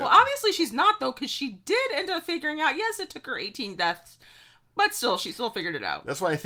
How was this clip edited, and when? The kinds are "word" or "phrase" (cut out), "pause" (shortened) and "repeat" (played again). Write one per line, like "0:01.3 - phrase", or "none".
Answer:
none